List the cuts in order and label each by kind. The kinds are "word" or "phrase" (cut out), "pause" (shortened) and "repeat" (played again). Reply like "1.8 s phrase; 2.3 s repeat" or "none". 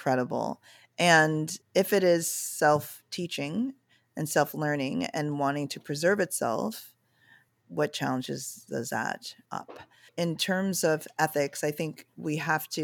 1.6 s pause; 7.5 s word; 9.5 s word; 10.1 s word